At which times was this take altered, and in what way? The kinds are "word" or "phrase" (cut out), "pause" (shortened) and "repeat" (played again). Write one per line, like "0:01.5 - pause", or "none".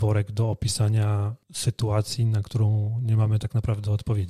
0:01.4 - pause